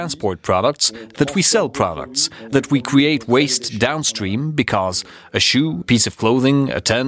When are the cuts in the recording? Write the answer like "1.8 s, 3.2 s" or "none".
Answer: 2.5 s, 5.8 s